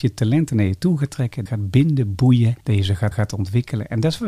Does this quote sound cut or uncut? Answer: cut